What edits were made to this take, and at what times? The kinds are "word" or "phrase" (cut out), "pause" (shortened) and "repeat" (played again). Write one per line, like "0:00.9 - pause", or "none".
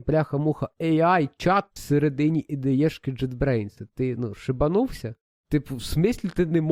none